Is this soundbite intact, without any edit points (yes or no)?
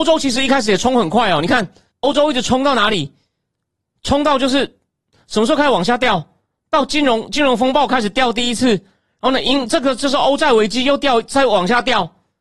no